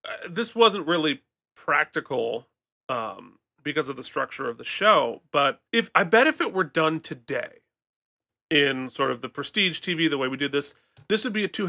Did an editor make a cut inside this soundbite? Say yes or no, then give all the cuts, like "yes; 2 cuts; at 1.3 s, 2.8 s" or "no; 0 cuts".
yes; 1 cut; at 5.7 s